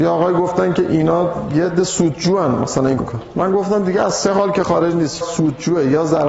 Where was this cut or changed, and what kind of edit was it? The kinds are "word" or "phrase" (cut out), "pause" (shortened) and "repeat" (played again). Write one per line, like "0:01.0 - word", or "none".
0:03.0 - word
0:05.2 - word